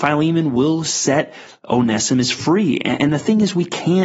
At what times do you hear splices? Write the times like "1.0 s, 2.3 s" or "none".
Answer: none